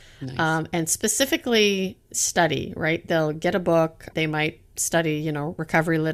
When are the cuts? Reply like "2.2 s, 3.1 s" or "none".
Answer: 4.1 s